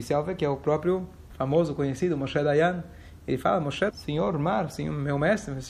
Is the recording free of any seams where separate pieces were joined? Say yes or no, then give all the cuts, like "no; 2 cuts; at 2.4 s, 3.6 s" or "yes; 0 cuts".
no; 1 cut; at 3.9 s